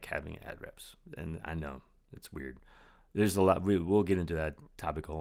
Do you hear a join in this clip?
no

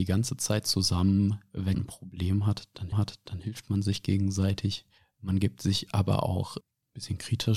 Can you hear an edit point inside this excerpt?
yes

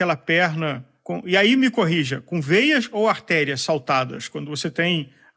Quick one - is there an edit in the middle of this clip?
no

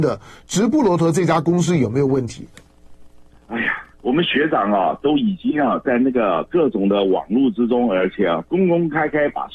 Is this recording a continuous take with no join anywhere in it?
no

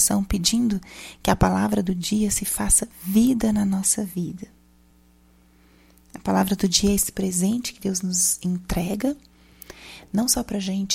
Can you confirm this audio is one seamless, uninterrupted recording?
yes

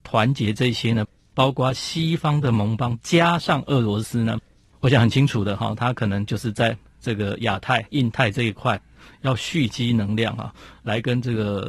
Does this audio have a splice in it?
no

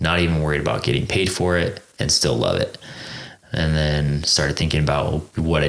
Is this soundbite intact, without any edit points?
yes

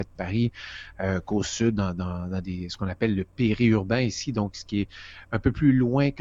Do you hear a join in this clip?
no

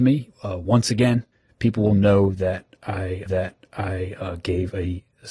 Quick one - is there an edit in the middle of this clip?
yes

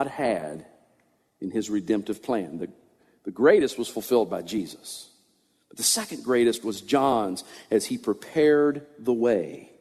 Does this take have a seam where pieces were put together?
no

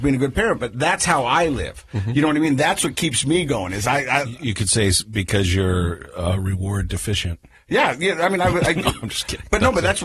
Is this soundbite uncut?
yes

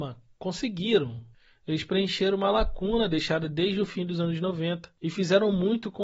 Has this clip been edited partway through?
no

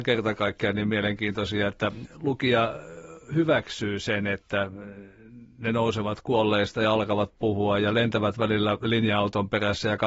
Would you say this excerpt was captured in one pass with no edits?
yes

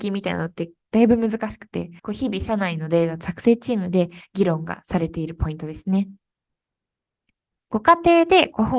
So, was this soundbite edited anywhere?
yes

